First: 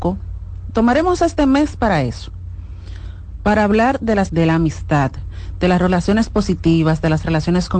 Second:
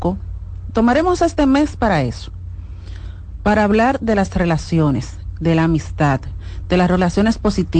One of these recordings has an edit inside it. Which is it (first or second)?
first